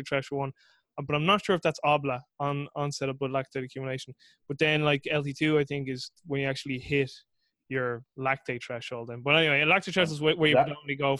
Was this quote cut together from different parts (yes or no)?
no